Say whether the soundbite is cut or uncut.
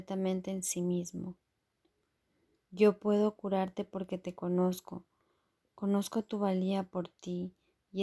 uncut